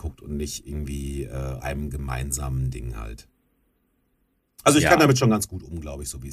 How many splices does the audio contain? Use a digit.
1